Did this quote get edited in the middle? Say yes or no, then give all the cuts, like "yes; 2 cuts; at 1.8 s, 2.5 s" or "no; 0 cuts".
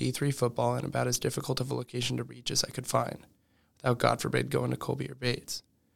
no; 0 cuts